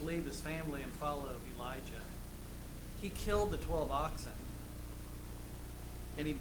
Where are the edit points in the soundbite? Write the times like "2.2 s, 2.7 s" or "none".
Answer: none